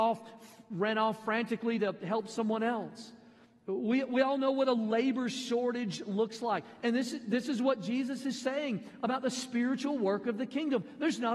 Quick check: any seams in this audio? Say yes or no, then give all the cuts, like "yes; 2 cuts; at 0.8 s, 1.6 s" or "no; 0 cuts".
no; 0 cuts